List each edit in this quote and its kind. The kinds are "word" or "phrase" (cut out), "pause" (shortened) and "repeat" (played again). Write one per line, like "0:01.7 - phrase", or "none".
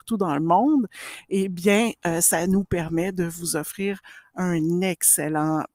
none